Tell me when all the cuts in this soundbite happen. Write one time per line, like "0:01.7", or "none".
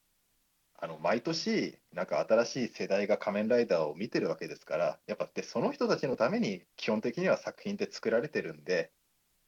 0:06.7